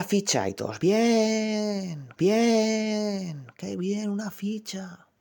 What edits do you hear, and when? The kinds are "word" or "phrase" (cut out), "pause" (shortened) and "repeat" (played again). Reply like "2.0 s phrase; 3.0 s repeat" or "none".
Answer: 2.2 s repeat